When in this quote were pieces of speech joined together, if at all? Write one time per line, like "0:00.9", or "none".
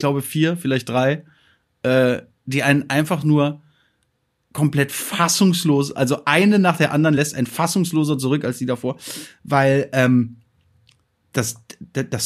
none